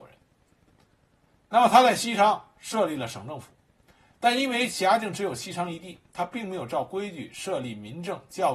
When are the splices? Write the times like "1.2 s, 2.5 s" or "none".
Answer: none